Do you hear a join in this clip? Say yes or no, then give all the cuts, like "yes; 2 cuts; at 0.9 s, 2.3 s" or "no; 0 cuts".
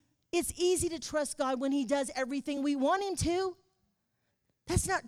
no; 0 cuts